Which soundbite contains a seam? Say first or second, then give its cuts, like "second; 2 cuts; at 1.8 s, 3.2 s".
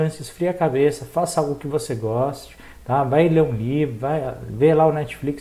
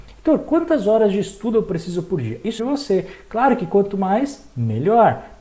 second; 1 cut; at 2.6 s